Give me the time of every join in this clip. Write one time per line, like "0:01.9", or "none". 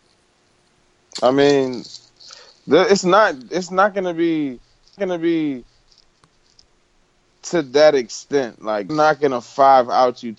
0:05.0
0:08.9